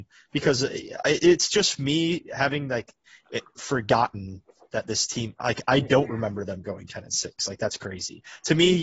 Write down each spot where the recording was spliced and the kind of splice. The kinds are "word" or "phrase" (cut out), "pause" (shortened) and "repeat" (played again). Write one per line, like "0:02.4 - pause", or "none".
none